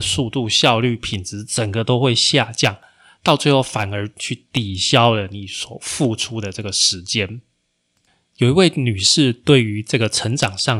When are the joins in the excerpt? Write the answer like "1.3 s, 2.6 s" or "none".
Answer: none